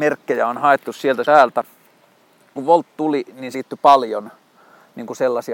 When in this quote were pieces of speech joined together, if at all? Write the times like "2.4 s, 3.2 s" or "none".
1.2 s, 2.6 s, 3.5 s